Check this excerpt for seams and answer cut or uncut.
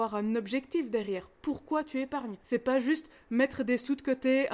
cut